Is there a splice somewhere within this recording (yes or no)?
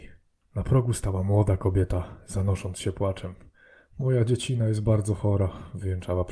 no